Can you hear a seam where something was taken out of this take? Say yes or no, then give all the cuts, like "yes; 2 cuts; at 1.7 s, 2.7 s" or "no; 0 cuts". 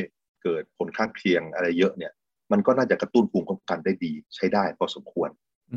yes; 1 cut; at 4.2 s